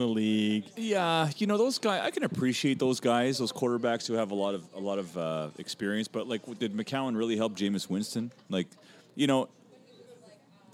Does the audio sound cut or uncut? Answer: uncut